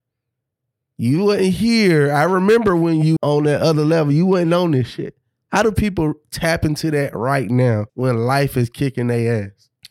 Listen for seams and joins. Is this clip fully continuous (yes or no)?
no